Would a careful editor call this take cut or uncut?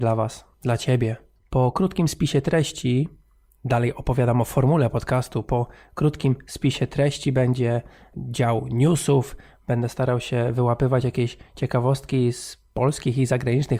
uncut